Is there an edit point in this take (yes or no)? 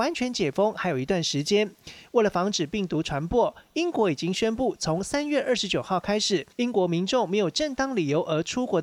yes